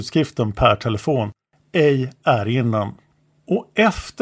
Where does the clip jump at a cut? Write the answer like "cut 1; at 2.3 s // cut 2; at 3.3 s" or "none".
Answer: none

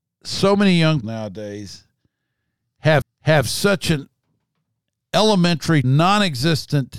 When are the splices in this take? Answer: cut 1; at 1.0 s // cut 2; at 3.0 s // cut 3; at 5.8 s

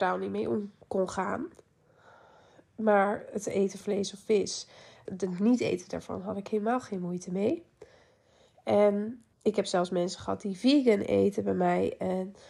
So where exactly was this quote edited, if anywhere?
cut 1; at 3.8 s // cut 2; at 5.1 s // cut 3; at 9.3 s

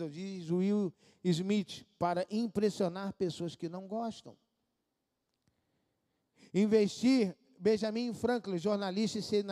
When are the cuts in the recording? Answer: none

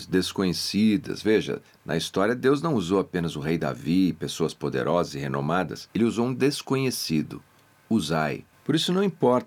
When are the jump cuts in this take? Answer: none

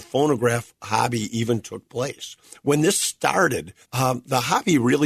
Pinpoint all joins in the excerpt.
cut 1; at 3.8 s

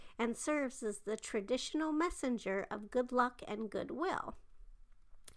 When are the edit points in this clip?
none

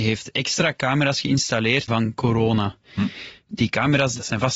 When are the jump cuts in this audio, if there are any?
cut 1; at 1.9 s

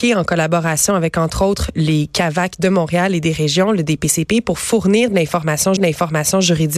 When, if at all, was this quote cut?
cut 1; at 1.7 s // cut 2; at 5.8 s

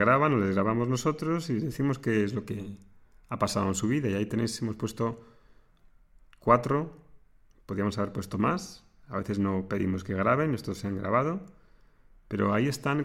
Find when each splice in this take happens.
none

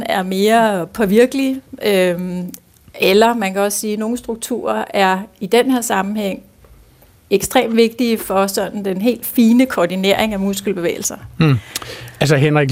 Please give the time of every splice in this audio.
none

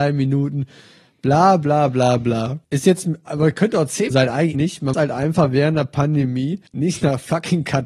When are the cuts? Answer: cut 1; at 2.6 s // cut 2; at 4.1 s // cut 3; at 4.5 s // cut 4; at 4.9 s // cut 5; at 6.7 s

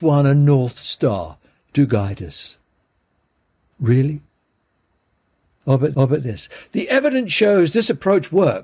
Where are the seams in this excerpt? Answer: cut 1; at 5.9 s

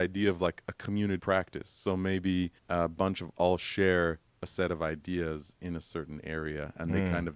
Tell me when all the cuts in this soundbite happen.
cut 1; at 1.2 s // cut 2; at 2.6 s // cut 3; at 3.3 s

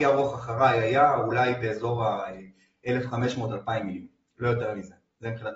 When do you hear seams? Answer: none

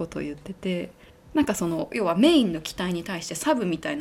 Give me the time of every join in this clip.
cut 1; at 1.1 s

